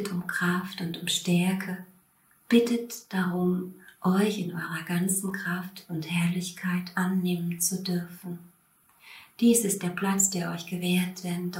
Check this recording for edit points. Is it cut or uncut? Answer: uncut